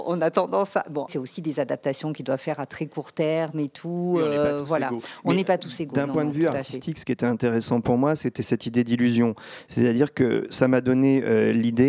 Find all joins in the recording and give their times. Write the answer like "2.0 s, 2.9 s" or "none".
1.1 s